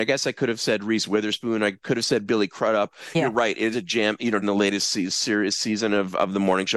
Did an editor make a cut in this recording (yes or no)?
yes